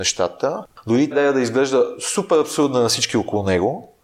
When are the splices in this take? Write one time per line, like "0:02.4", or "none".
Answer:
0:01.1